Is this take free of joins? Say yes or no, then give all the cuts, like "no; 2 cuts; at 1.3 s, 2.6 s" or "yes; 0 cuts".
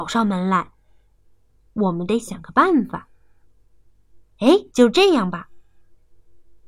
no; 1 cut; at 4.7 s